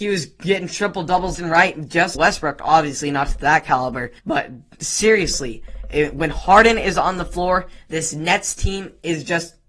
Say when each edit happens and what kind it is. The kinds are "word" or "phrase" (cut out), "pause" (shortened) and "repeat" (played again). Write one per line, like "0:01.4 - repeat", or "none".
0:01.3 - word
0:02.1 - phrase
0:04.2 - pause